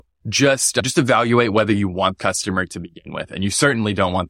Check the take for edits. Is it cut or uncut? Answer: cut